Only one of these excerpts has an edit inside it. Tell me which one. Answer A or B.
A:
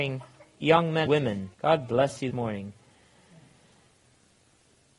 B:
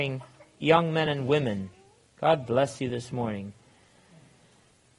A